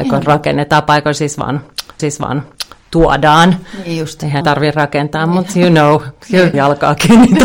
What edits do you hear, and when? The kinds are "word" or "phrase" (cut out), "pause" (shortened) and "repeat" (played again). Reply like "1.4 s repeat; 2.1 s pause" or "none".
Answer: 2.0 s repeat; 4.4 s word; 5.5 s word; 6.5 s phrase